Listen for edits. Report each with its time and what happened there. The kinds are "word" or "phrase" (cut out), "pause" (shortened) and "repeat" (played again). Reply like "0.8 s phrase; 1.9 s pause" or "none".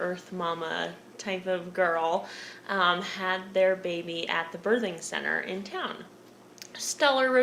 none